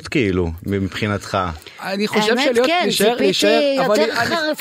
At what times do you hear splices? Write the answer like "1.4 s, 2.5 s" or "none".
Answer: none